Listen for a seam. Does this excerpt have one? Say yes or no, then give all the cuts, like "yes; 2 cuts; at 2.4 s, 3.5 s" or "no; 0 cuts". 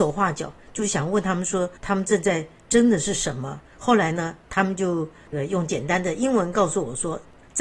yes; 3 cuts; at 1.8 s, 3.7 s, 4.4 s